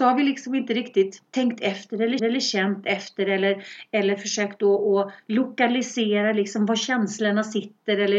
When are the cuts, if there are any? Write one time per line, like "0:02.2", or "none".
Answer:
0:01.3
0:02.2